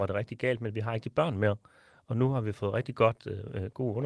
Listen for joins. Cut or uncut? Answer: uncut